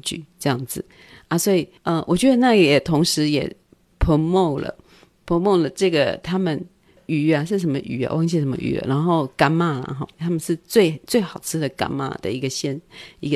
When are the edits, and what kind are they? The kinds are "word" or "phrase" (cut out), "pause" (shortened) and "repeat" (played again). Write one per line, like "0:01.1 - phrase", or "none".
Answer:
0:01.8 - pause